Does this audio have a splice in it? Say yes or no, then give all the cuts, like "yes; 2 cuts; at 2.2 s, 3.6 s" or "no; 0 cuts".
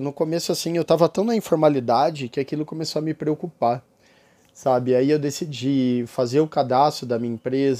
no; 0 cuts